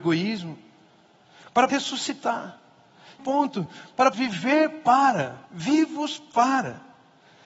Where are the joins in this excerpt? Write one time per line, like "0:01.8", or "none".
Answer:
0:01.7
0:03.2
0:04.1
0:05.4

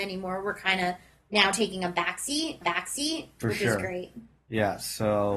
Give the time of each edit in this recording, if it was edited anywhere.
0:02.6

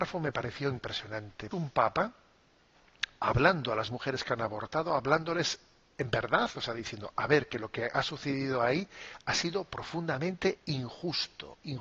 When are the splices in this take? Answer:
0:01.5

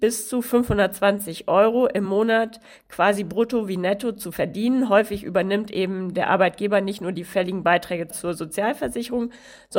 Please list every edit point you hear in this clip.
none

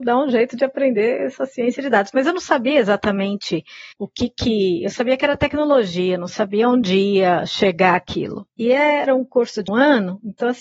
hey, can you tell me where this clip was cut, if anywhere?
0:03.9
0:08.5
0:09.7

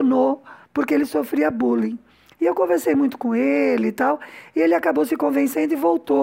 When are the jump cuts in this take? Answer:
none

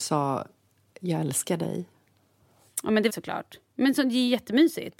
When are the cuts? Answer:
0:03.1

